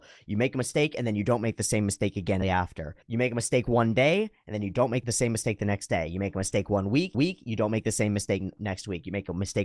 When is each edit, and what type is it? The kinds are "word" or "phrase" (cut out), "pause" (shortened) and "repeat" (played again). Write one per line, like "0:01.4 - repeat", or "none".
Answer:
0:02.4 - word
0:03.0 - pause
0:05.0 - word
0:07.1 - repeat
0:08.6 - word